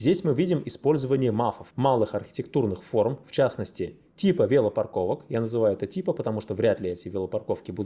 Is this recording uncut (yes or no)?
no